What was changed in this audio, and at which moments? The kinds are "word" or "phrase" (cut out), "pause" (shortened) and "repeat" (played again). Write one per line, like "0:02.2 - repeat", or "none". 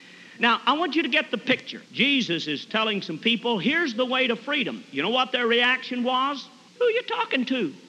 0:01.8 - pause
0:06.7 - pause